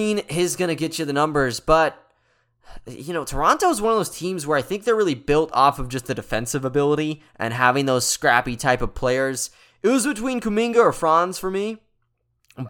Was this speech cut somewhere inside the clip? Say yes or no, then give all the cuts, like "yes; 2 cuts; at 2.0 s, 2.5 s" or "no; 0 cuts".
no; 0 cuts